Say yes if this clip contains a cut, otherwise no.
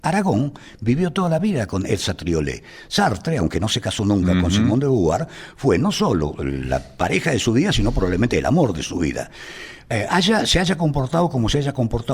no